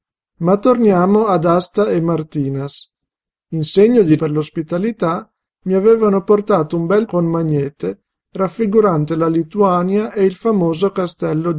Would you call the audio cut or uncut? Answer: cut